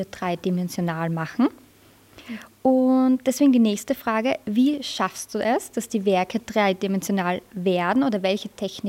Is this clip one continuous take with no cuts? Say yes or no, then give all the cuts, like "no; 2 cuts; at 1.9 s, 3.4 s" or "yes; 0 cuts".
yes; 0 cuts